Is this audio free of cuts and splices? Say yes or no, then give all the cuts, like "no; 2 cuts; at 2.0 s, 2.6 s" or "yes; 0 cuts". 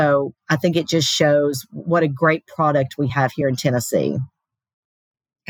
yes; 0 cuts